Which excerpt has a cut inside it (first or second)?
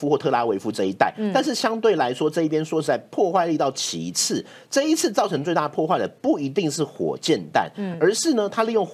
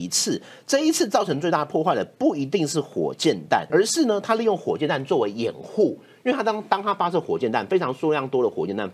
second